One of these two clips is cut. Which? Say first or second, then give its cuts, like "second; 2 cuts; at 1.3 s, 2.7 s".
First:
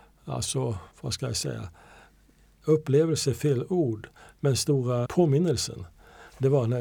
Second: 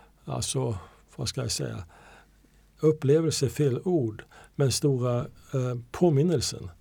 first; 2 cuts; at 0.9 s, 5.1 s